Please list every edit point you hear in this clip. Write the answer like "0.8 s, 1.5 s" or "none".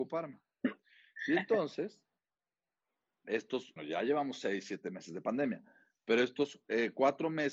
3.8 s